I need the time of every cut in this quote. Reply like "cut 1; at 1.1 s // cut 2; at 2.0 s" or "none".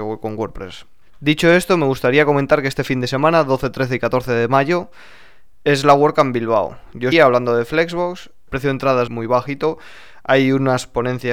cut 1; at 7.1 s // cut 2; at 9.1 s